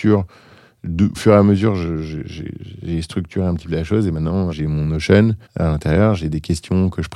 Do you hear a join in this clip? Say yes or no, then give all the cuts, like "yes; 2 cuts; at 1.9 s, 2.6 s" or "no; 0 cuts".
yes; 4 cuts; at 1.1 s, 3.6 s, 4.5 s, 5.4 s